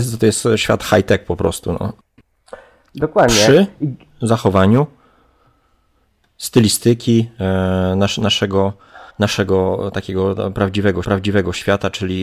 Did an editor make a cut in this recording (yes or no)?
yes